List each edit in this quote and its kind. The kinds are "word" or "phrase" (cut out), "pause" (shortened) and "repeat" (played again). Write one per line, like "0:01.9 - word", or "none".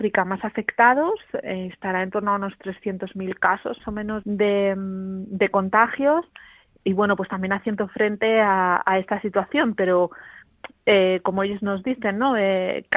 0:01.4 - word
0:03.8 - word
0:04.2 - word
0:06.8 - word